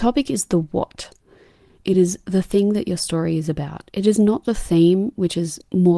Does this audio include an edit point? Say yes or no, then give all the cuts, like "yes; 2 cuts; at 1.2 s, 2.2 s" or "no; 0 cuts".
no; 0 cuts